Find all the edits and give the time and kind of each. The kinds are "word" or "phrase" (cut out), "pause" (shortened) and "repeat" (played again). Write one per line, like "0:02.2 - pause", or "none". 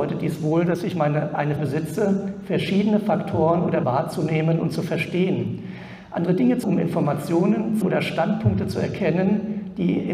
0:01.6 - word
0:03.8 - word
0:06.6 - word
0:07.8 - word